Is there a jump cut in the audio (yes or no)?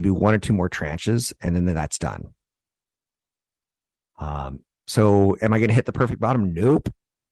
no